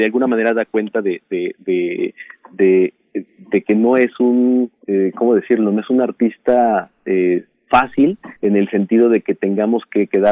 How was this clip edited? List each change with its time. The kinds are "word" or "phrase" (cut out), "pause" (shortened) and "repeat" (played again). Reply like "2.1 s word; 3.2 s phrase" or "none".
4.8 s pause; 8.4 s pause